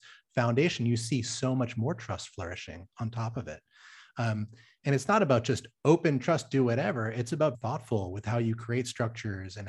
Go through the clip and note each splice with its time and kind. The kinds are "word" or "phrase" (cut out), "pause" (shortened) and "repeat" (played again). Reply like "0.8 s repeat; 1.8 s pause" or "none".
7.5 s word

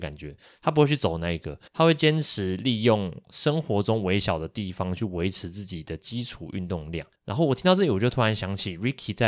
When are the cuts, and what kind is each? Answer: 1.7 s pause; 7.1 s pause

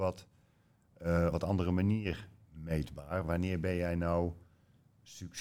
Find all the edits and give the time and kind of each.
1.3 s phrase

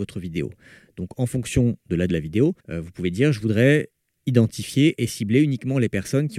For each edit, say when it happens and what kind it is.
2.1 s word; 2.6 s pause

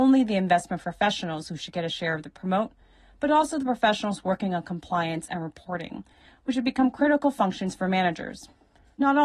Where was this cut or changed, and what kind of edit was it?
none

